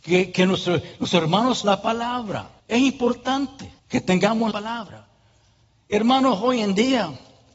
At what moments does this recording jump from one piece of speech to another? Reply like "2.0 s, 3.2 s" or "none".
1.6 s, 2.6 s, 3.8 s, 4.5 s